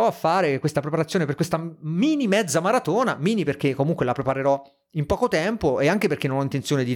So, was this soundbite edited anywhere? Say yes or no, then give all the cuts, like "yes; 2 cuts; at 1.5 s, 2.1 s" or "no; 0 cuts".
no; 0 cuts